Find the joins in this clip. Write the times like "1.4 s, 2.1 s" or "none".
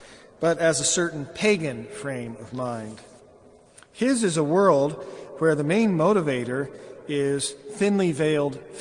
none